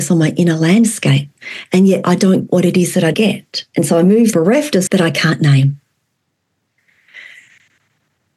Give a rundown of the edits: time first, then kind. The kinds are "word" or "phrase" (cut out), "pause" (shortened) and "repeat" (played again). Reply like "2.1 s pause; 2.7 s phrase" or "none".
2.5 s word; 3.1 s word; 4.3 s phrase; 4.9 s word